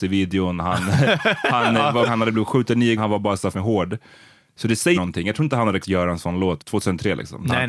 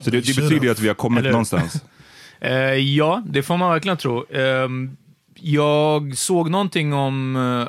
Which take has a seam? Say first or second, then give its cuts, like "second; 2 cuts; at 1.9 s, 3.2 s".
first; 6 cuts; at 2.1 s, 3.0 s, 3.5 s, 4.9 s, 5.8 s, 6.6 s